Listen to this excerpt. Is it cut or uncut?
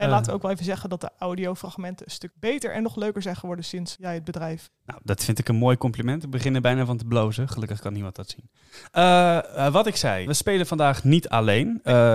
cut